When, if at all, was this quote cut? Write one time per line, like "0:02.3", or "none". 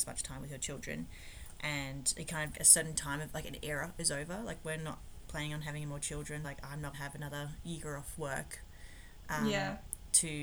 0:02.5
0:06.4
0:06.9

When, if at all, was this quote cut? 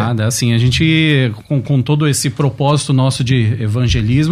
none

